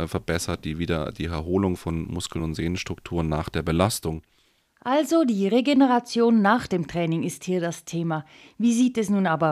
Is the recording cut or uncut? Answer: uncut